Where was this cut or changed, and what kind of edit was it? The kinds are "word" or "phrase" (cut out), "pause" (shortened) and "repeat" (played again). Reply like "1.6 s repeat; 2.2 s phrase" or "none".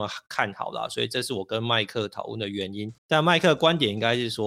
3.0 s pause